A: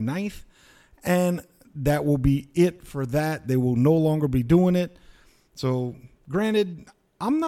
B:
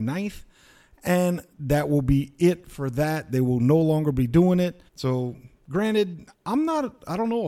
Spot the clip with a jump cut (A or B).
B